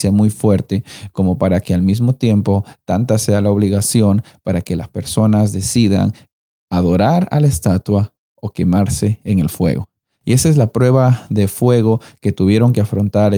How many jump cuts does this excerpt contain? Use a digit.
0